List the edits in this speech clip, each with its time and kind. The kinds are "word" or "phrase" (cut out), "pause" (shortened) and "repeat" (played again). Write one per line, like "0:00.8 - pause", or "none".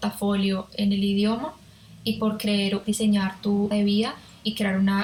0:02.8 - phrase
0:03.7 - word